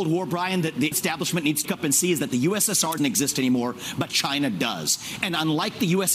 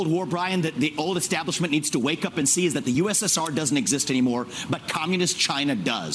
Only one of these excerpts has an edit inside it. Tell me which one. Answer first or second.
first